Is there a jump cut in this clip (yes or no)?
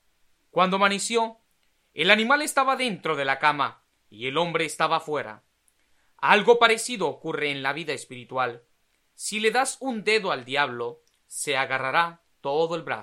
no